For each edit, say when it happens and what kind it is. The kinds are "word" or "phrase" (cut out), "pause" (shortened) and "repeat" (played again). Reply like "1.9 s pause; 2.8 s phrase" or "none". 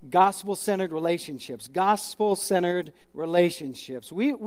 3.0 s pause